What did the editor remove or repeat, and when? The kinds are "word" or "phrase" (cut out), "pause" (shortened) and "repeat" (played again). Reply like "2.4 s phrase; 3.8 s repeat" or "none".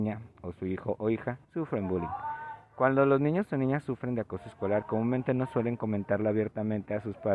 1.4 s pause